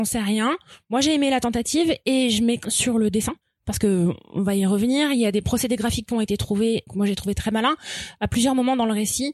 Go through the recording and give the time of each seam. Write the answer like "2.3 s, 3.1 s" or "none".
2.6 s, 3.4 s, 6.9 s